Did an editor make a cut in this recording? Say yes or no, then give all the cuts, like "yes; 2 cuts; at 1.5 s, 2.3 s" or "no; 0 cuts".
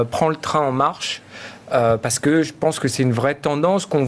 no; 0 cuts